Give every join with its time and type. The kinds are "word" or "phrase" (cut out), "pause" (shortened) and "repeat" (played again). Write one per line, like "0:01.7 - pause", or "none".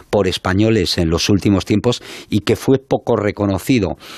none

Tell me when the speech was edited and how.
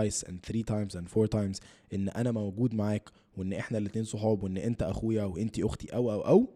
none

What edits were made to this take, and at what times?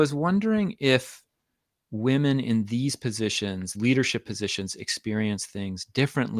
0:03.7 - word

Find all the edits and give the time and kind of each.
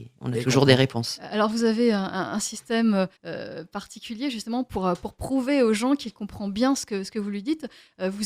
0:03.2 - pause

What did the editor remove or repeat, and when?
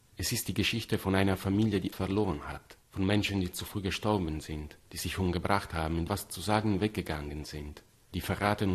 0:01.9 - word
0:06.1 - word

